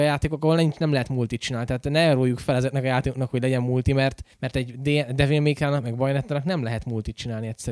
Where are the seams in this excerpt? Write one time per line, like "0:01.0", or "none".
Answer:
0:04.3